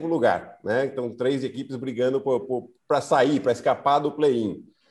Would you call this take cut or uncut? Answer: uncut